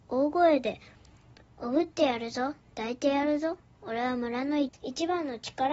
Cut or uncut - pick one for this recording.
uncut